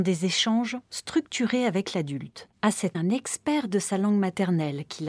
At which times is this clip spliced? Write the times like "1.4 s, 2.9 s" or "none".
2.5 s, 2.9 s